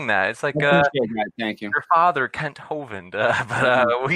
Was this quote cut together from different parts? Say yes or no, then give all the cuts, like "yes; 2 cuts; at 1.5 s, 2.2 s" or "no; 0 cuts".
no; 0 cuts